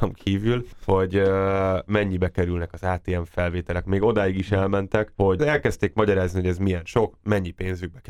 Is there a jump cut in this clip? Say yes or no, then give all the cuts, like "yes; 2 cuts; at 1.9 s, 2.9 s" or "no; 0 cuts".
yes; 1 cut; at 5.4 s